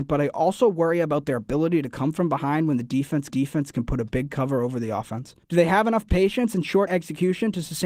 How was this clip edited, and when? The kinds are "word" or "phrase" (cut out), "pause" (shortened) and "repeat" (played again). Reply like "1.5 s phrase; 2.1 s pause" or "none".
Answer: 3.3 s repeat; 5.4 s pause; 6.9 s word